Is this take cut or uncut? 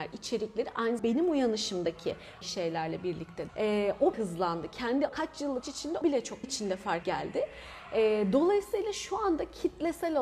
cut